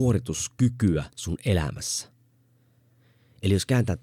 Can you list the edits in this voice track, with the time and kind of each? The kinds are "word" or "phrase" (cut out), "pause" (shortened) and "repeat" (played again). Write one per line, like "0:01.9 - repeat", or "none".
0:01.1 - pause